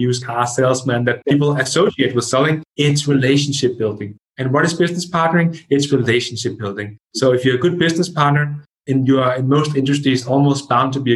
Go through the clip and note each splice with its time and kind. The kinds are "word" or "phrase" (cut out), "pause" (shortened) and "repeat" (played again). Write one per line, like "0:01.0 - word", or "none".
0:02.7 - pause